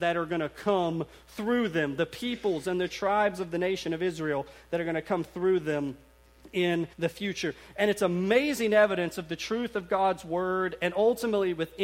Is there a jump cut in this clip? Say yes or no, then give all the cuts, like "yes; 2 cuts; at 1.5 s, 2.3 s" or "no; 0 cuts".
yes; 1 cut; at 6.9 s